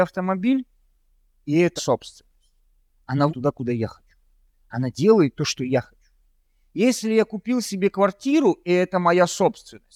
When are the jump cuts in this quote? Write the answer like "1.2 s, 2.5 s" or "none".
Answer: 1.8 s, 3.3 s